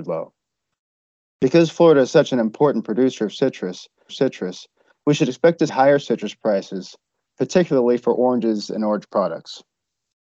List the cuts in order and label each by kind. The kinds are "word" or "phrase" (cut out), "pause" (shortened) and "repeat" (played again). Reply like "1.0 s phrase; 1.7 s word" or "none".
4.1 s repeat; 5.7 s word